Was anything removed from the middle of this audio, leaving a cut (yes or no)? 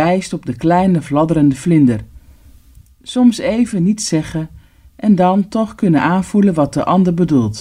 no